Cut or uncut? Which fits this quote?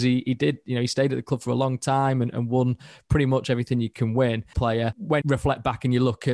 cut